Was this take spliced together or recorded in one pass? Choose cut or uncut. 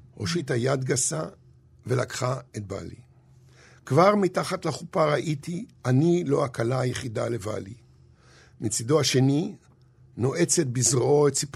uncut